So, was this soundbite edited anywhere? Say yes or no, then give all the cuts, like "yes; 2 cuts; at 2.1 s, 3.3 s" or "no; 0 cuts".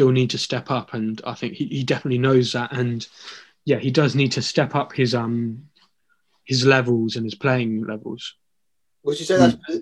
no; 0 cuts